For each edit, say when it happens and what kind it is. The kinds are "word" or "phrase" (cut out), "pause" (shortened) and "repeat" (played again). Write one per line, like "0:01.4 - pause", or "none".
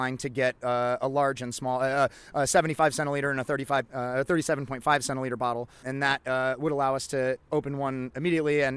0:03.8 - word
0:05.8 - word